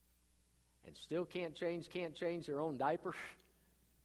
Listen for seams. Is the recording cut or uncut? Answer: cut